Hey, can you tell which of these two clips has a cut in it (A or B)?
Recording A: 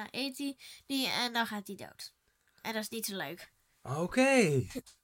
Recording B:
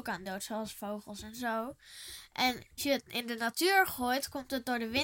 B